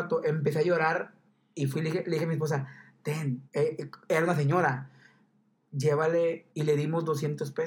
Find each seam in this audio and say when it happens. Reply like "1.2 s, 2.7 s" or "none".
1.3 s, 3.5 s, 6.5 s